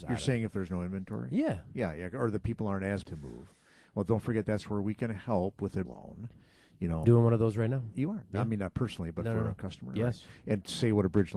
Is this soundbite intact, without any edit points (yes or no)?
no